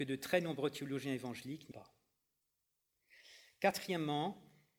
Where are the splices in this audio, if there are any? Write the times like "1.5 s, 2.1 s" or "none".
1.7 s

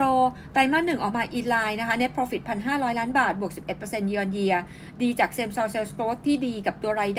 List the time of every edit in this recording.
none

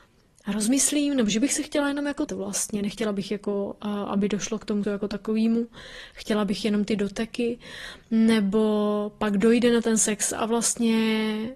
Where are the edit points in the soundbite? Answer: 2.3 s, 4.8 s

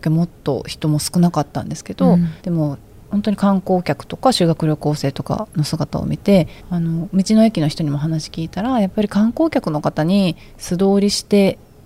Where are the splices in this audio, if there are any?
2.4 s, 2.9 s, 6.6 s

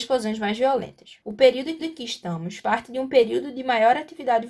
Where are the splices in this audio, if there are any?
1.2 s, 1.8 s, 2.6 s

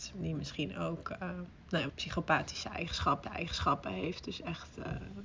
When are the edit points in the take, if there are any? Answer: 1.9 s, 3.2 s

